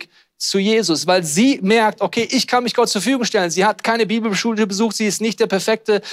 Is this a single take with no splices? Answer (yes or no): yes